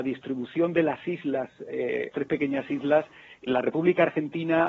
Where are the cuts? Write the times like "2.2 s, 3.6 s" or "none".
2.1 s, 3.5 s